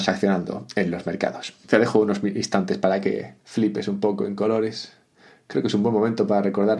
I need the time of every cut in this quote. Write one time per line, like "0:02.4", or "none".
0:01.6
0:03.4